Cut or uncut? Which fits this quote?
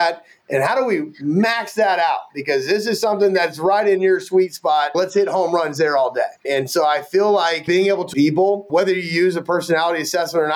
cut